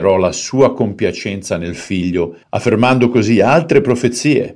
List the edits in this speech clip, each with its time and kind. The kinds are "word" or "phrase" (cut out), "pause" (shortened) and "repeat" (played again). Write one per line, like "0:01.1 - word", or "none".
0:02.4 - pause